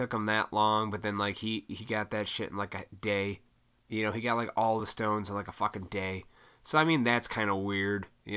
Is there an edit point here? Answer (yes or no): no